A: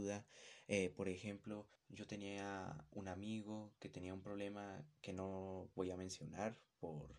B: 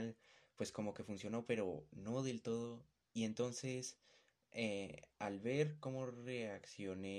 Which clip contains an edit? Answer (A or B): A